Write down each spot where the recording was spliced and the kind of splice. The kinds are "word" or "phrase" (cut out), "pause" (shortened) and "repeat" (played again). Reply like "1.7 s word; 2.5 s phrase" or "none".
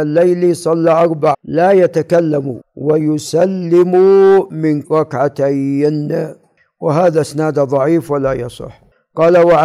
1.3 s word; 2.6 s phrase; 4.8 s word